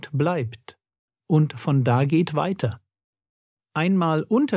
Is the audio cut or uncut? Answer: uncut